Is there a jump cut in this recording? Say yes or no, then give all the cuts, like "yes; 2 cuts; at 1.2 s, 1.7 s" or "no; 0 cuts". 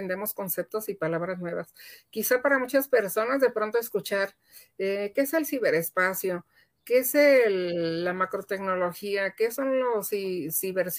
no; 0 cuts